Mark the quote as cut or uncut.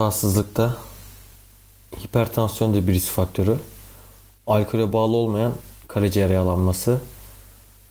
uncut